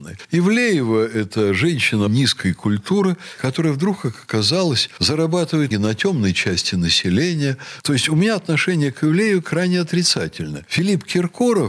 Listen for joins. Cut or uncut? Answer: cut